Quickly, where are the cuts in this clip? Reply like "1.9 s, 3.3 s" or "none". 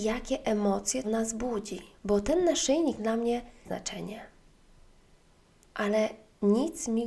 1.0 s, 2.0 s, 3.0 s, 3.6 s